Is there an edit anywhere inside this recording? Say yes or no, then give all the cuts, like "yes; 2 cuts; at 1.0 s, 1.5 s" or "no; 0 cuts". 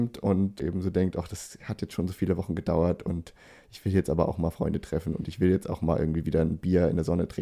no; 0 cuts